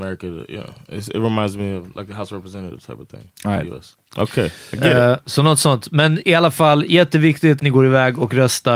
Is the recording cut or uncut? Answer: cut